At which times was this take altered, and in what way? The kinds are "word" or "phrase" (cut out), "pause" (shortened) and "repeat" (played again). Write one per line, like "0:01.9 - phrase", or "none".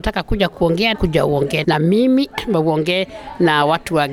0:00.9 - phrase
0:01.6 - word